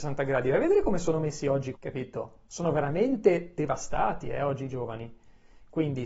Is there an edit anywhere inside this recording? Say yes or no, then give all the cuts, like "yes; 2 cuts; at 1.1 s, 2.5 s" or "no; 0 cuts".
yes; 1 cut; at 1.7 s